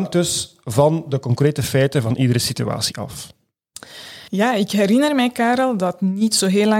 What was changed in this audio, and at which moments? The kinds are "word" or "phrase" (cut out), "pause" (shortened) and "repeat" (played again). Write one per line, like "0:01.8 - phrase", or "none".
0:04.3 - pause